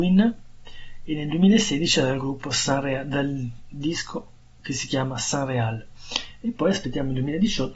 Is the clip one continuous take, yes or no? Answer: yes